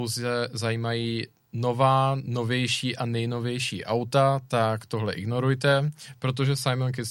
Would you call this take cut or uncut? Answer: uncut